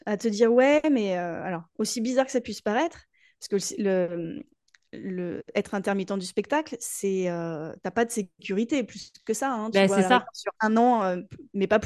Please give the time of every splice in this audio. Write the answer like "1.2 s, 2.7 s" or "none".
none